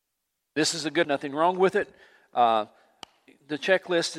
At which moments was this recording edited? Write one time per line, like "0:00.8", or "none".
0:01.0
0:03.3